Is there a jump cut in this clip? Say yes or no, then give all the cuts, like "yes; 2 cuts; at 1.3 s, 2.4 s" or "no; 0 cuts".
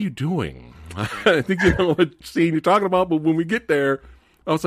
no; 0 cuts